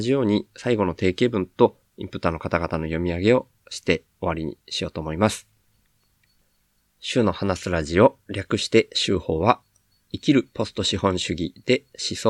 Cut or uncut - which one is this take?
cut